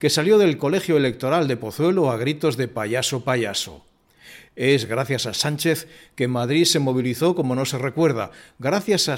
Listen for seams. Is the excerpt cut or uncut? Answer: uncut